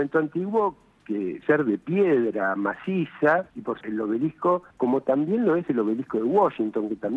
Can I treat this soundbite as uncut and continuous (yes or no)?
no